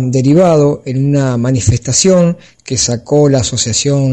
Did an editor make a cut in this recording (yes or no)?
no